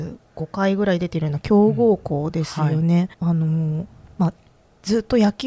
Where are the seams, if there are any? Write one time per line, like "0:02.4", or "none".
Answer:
0:03.1